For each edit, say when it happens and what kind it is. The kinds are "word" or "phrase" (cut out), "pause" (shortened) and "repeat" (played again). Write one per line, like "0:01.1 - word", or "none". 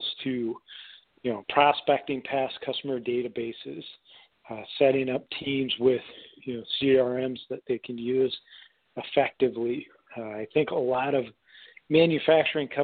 none

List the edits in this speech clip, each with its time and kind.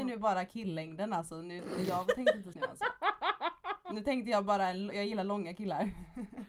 0:02.5 - word

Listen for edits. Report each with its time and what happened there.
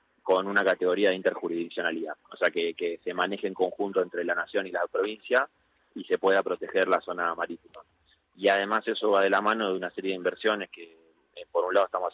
none

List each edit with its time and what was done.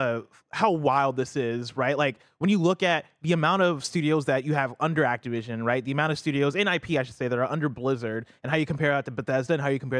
none

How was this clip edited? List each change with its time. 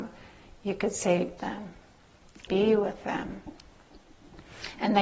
0:01.4 - phrase
0:02.5 - word

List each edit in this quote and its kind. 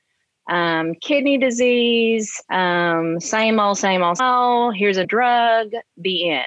0:02.4 - pause
0:04.2 - word
0:05.0 - word

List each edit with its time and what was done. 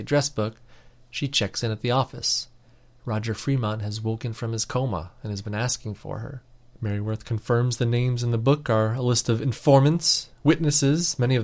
none

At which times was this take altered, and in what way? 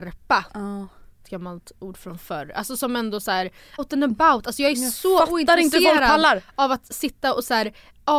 0:01.2 - phrase
0:03.8 - word

